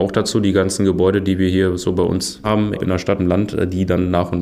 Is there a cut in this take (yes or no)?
yes